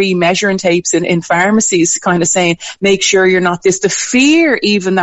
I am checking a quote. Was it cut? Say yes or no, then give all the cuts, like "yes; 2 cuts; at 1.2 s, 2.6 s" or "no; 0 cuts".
no; 0 cuts